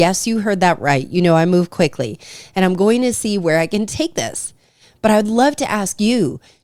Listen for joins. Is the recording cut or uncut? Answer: uncut